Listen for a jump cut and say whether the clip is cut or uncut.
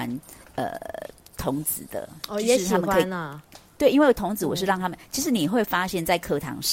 uncut